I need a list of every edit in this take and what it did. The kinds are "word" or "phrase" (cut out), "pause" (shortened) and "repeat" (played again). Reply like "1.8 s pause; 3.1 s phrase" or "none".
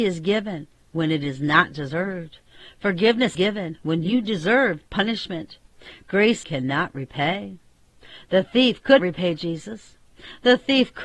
3.3 s word; 6.4 s phrase; 9.0 s word